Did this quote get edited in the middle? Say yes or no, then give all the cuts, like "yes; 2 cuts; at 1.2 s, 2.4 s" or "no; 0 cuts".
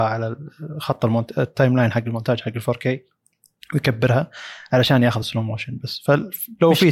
no; 0 cuts